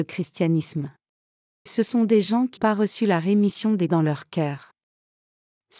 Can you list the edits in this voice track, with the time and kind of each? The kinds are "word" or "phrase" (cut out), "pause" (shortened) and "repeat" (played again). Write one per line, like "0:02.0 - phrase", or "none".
0:01.7 - word
0:02.6 - word
0:03.9 - word